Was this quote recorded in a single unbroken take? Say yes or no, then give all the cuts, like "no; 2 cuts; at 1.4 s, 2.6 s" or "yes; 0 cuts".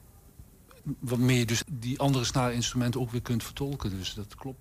no; 1 cut; at 1.6 s